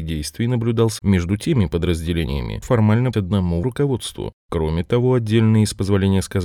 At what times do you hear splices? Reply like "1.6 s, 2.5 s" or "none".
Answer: 1.0 s, 2.6 s, 3.1 s, 3.6 s